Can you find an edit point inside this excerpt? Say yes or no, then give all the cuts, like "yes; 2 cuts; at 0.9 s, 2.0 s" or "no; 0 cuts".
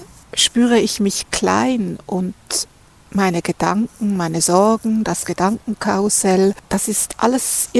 no; 0 cuts